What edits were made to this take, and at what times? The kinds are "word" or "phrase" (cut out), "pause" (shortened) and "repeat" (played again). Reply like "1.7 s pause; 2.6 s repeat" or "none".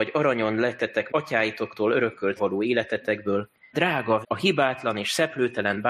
1.1 s word; 2.4 s word; 3.7 s word; 4.2 s word